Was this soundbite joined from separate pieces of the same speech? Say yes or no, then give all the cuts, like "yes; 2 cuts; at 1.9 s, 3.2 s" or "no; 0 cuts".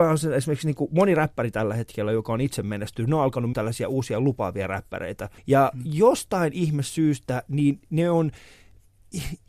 yes; 2 cuts; at 3.5 s, 5.4 s